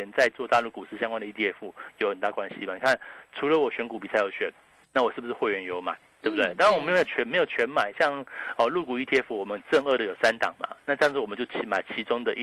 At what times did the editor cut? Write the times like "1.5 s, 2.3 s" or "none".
none